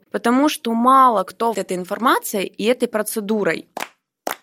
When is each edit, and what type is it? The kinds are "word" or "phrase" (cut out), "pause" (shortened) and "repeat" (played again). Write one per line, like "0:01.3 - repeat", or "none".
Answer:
0:01.5 - word